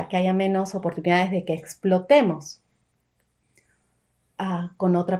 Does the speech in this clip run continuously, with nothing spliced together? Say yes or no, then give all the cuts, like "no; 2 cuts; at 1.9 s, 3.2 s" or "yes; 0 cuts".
yes; 0 cuts